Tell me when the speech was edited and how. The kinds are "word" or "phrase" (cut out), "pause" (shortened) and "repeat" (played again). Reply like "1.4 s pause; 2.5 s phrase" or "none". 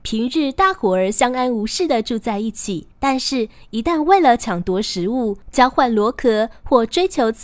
2.9 s pause